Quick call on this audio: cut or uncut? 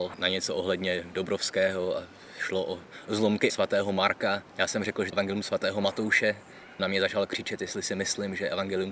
cut